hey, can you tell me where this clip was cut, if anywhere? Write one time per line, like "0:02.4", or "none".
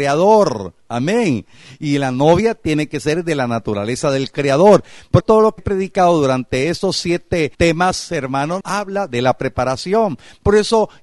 0:05.2
0:05.6
0:07.5
0:08.6

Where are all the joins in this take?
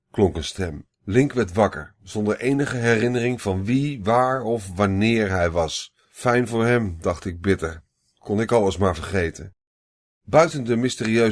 0:00.9
0:06.0

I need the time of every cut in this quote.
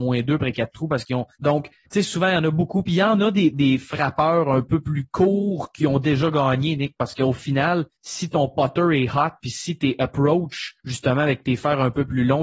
0:01.3
0:01.8
0:07.9
0:10.8

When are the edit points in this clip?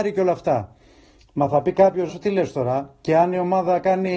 0:02.1

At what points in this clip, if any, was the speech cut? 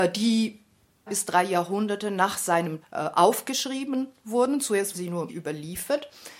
0:01.1
0:02.8
0:04.9
0:05.3

